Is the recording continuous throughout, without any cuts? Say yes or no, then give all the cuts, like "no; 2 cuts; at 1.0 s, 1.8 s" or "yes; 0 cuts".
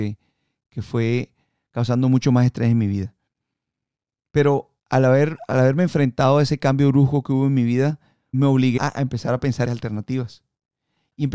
no; 4 cuts; at 4.8 s, 8.3 s, 8.8 s, 9.6 s